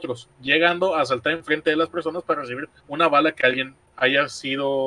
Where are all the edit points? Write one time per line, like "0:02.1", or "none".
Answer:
0:02.8

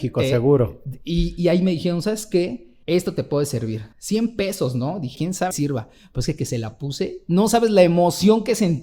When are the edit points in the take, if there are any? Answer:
0:02.8
0:03.9
0:05.2
0:05.5
0:06.4

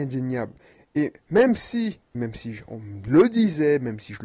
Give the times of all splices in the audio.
0:01.2
0:02.1

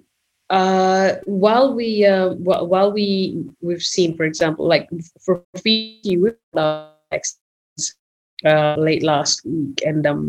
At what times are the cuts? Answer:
0:05.4

